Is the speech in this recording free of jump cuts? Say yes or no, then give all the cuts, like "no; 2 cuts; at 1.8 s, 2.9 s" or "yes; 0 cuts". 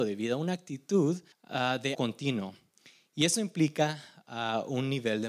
no; 2 cuts; at 1.3 s, 1.9 s